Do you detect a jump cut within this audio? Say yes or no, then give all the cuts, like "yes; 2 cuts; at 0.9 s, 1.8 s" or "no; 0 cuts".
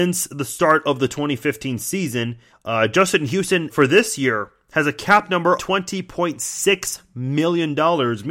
yes; 3 cuts; at 2.5 s, 3.7 s, 5.6 s